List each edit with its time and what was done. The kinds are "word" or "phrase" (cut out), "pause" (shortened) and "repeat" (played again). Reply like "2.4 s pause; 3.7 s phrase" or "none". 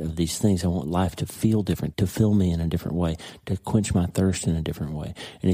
1.9 s word